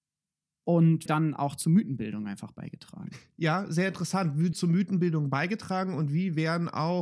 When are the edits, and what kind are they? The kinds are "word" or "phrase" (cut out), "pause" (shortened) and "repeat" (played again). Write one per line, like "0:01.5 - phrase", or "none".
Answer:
0:01.1 - phrase
0:04.5 - word